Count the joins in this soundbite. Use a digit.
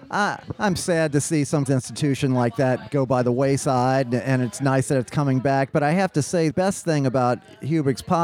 2